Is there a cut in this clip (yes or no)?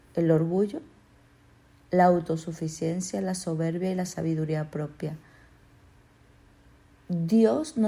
no